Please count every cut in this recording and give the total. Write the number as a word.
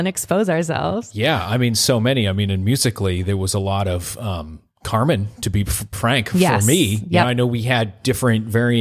zero